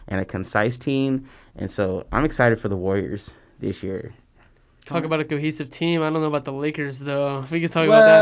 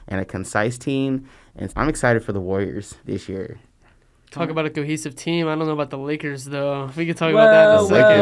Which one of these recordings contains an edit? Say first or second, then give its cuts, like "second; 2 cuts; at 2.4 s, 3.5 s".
second; 2 cuts; at 1.7 s, 3.0 s